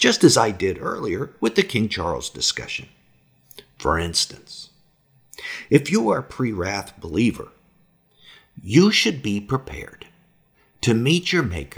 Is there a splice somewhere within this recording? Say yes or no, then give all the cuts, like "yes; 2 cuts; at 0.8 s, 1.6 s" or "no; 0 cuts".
no; 0 cuts